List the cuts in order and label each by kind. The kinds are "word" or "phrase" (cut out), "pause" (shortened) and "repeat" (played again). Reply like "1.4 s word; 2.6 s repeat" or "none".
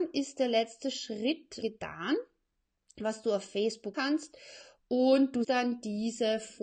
1.6 s word; 3.9 s word; 5.4 s word